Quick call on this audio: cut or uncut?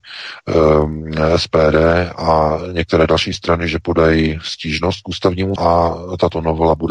cut